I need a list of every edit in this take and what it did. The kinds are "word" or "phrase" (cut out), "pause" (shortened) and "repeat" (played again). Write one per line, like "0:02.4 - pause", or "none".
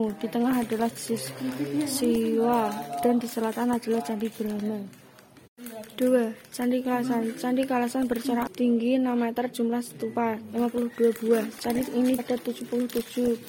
0:00.9 - word
0:08.5 - word
0:09.5 - word
0:12.2 - word